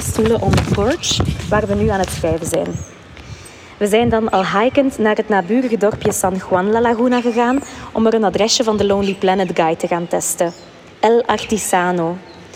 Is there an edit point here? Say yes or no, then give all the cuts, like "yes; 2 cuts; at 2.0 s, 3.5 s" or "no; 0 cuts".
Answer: no; 0 cuts